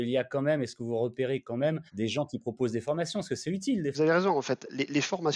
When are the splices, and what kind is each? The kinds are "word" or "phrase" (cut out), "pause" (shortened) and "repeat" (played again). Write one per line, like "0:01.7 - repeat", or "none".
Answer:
0:01.9 - pause
0:03.9 - phrase